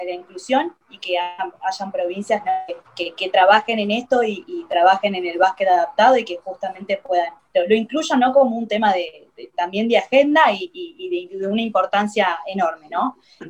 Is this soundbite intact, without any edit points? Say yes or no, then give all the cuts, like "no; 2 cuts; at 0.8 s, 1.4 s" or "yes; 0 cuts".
no; 2 cuts; at 2.9 s, 7.4 s